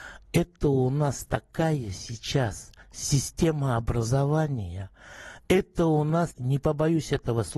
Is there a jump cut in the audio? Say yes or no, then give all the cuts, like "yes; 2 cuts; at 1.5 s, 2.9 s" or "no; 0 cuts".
yes; 2 cuts; at 2.8 s, 6.3 s